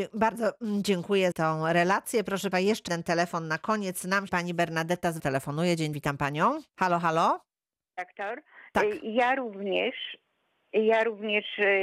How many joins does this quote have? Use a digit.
7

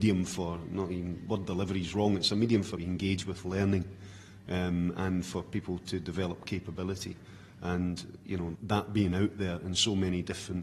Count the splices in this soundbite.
3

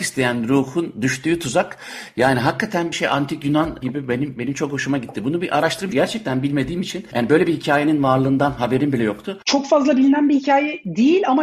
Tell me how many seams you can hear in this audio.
3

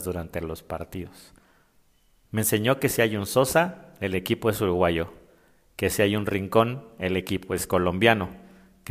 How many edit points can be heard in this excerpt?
0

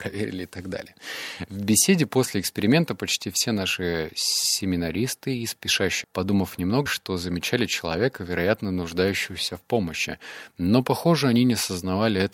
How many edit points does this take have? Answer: 2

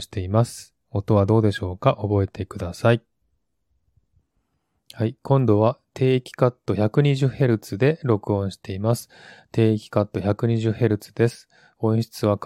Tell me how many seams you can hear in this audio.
0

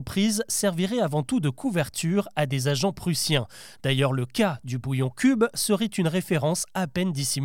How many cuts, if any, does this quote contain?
0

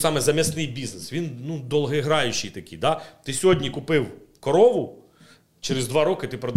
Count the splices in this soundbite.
0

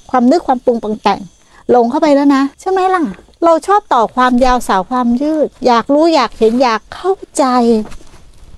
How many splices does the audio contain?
2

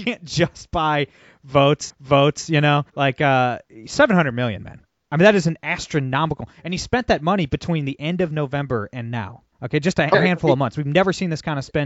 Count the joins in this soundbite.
5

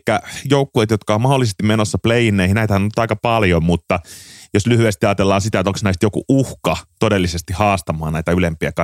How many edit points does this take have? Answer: 0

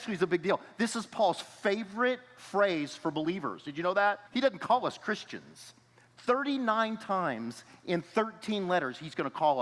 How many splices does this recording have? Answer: 1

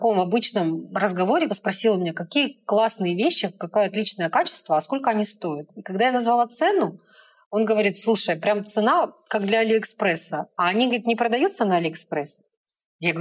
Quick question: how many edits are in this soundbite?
1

